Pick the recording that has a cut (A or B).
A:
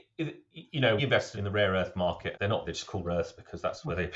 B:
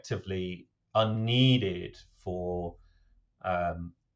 A